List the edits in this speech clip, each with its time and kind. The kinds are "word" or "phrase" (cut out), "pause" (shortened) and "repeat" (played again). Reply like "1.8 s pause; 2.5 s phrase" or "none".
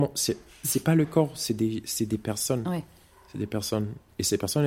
none